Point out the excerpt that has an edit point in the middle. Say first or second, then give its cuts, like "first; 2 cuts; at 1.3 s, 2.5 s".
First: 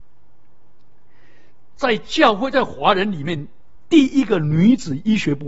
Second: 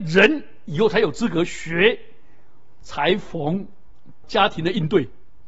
second; 1 cut; at 4.2 s